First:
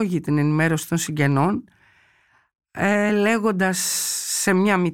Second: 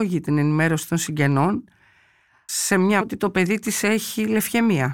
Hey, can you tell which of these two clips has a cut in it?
second; 2 cuts; at 2.5 s, 3.0 s

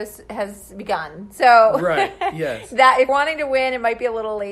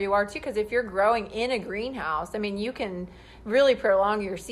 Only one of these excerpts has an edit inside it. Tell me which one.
first; 1 cut; at 3.1 s

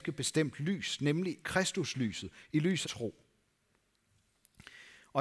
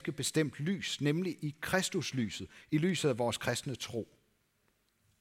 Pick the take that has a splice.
first; 2 cuts; at 1.4 s, 2.8 s

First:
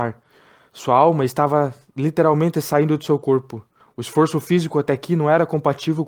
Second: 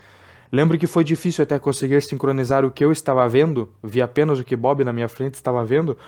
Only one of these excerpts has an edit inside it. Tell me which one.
first; 1 cut; at 3.8 s

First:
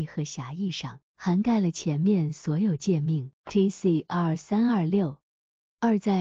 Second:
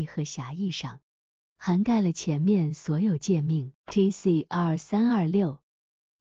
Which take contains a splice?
first; 1 cut; at 1.1 s

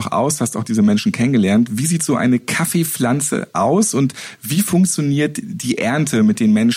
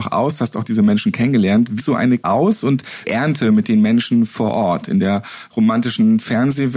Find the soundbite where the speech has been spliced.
second; 3 cuts; at 1.8 s, 2.2 s, 3.0 s

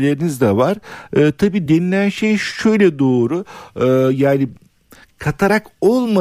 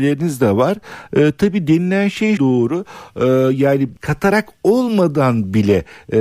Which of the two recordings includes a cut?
second; 2 cuts; at 2.4 s, 4.0 s

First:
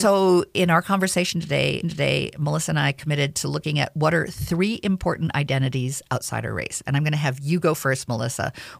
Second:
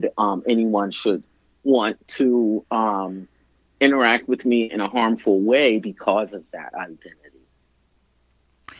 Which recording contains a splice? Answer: first; 1 cut; at 1.8 s

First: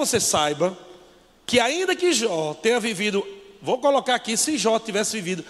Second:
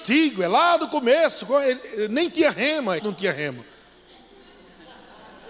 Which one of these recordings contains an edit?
second; 1 cut; at 3.0 s

